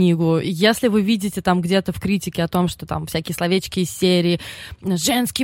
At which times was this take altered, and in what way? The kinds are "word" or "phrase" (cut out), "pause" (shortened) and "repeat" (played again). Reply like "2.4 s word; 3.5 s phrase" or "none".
none